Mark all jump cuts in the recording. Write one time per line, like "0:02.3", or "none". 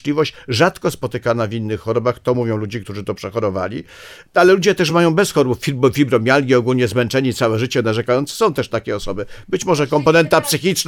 none

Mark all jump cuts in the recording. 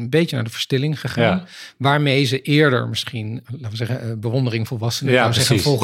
0:04.7

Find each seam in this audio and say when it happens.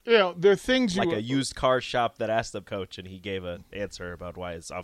0:02.6

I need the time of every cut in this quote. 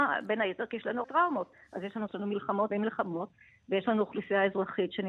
0:01.0
0:02.1
0:02.7

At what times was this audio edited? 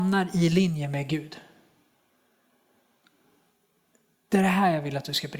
none

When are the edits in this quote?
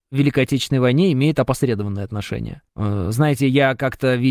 0:02.7

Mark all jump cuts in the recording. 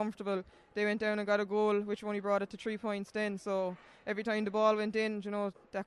none

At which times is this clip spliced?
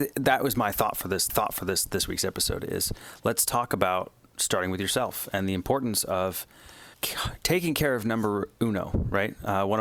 0:01.3
0:06.9

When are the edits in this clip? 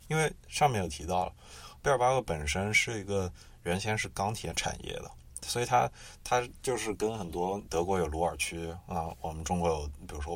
0:07.7

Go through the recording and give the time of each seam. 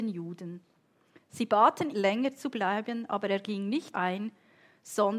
0:01.9
0:03.9

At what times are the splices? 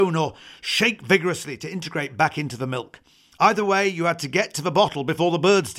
none

